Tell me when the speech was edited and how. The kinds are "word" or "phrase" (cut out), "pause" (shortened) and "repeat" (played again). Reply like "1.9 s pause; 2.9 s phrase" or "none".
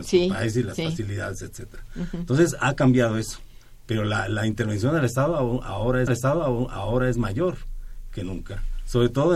6.1 s repeat